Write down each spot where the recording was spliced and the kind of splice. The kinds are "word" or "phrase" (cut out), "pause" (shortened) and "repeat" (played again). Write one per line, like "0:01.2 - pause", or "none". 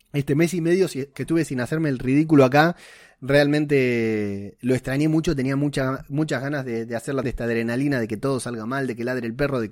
0:07.2 - word